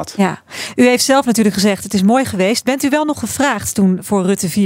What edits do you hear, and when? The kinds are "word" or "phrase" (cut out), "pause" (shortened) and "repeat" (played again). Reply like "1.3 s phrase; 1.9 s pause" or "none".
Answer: none